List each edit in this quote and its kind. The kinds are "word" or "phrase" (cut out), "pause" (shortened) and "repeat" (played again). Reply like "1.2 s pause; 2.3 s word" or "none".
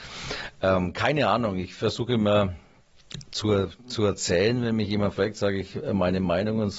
none